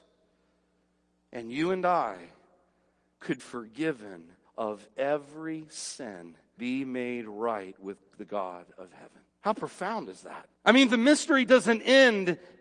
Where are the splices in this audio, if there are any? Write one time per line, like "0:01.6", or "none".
0:03.4
0:04.4
0:06.6
0:09.3
0:10.5